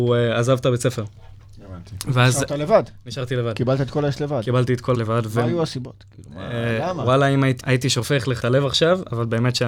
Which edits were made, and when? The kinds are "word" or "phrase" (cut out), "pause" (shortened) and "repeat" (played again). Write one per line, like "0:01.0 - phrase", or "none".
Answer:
0:04.9 - word
0:07.6 - word
0:08.4 - word

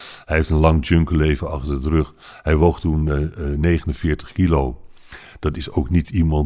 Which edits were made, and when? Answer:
none

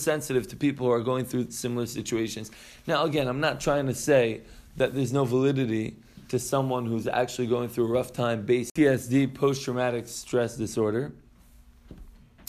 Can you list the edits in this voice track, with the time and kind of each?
none

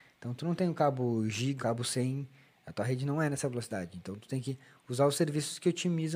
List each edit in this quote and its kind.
0:01.6 - word

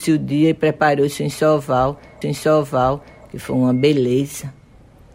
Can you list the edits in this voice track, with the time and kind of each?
0:02.2 - repeat

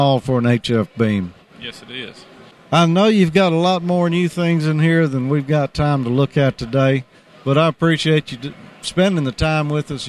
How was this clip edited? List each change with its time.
none

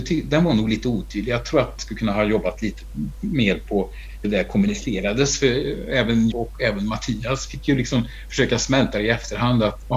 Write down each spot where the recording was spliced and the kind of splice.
0:01.8 - word
0:04.2 - word
0:06.3 - word

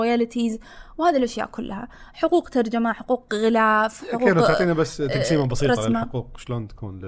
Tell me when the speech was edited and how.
none

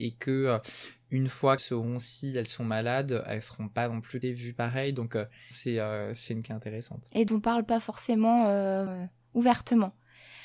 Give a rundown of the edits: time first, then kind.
0:01.6 - word
0:04.2 - word
0:05.5 - word
0:06.4 - word
0:07.3 - word
0:08.9 - word

